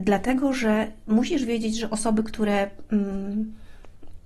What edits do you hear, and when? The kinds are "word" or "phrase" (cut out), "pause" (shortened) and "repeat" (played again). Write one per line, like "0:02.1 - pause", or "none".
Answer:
none